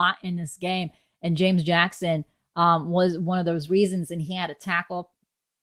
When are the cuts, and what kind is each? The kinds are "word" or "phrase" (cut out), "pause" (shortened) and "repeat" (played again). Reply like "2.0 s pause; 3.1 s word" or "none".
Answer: none